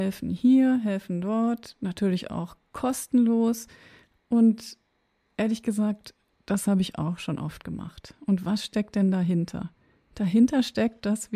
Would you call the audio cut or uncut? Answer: uncut